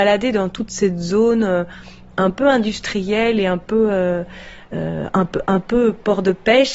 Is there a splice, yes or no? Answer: no